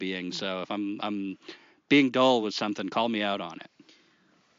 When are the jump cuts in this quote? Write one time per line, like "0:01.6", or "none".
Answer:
none

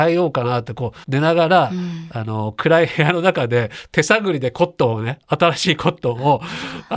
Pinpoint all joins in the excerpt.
0:01.0

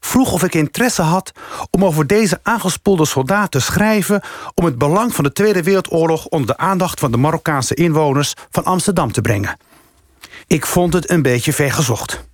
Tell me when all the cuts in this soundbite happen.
0:10.4

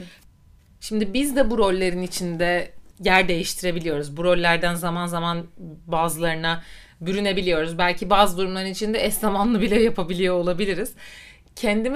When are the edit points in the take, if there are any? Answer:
0:02.9

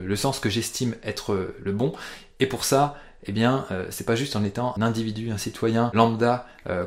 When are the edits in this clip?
0:04.8

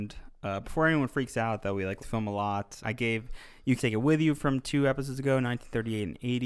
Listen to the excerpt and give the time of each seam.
0:02.0
0:02.8
0:03.8

